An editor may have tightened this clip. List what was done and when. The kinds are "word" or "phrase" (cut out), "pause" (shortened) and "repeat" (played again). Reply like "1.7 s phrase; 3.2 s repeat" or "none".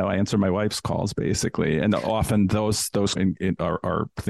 3.1 s phrase

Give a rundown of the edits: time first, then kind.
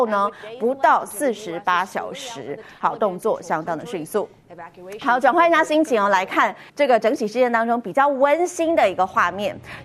6.7 s pause

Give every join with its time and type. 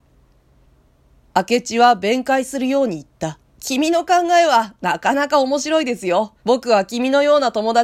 3.5 s pause; 6.4 s pause

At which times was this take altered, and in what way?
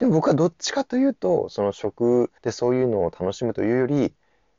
2.4 s pause

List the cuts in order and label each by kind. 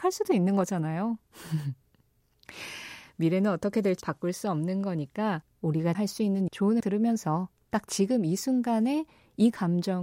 4.0 s phrase; 5.9 s word; 6.5 s word; 6.8 s word

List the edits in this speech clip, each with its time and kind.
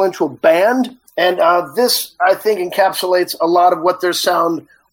1.1 s pause

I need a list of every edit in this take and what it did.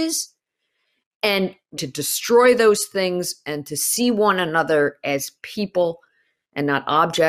1.8 s word

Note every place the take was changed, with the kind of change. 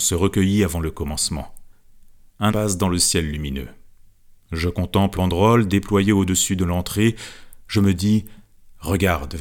2.5 s word; 5.1 s word

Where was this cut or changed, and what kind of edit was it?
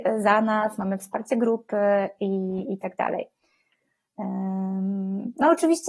none

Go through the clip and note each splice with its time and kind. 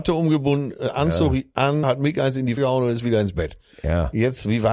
1.8 s word; 2.6 s word

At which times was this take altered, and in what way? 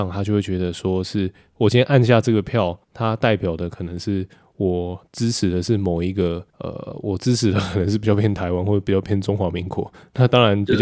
2.8 s pause; 5.1 s pause; 6.5 s pause

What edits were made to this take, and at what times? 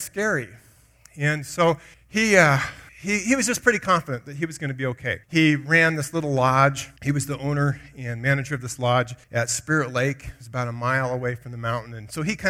1.9 s pause; 2.9 s pause; 5.2 s pause; 7.0 s pause; 9.2 s pause

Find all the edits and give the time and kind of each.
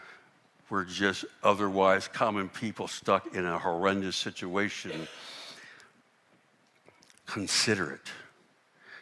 none

